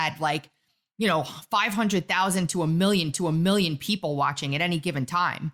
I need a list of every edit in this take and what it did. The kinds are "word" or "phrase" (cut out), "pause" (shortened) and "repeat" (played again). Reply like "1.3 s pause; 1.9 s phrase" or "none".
3.1 s repeat

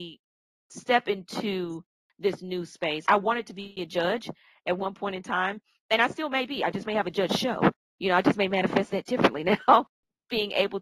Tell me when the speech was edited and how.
none

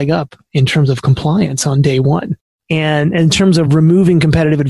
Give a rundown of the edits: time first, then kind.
none

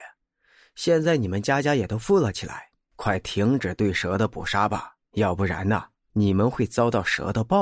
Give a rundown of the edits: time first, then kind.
5.0 s pause

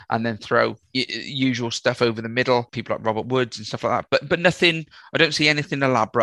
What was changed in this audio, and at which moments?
none

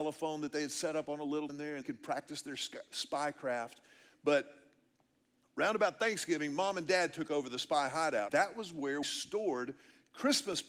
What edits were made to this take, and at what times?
1.5 s word; 1.8 s word; 8.3 s word; 9.0 s word

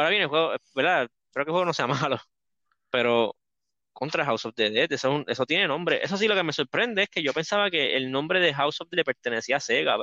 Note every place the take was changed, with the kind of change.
1.2 s pause; 8.9 s word

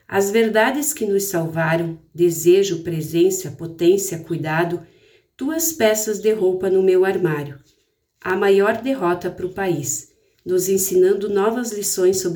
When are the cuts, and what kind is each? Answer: none

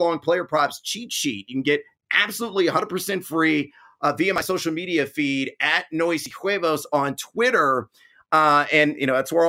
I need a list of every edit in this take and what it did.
none

